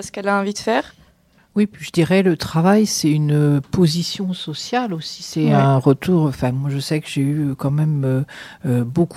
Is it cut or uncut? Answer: uncut